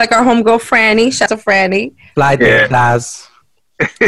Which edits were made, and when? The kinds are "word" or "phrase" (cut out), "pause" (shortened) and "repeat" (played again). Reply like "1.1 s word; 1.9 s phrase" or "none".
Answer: 1.3 s word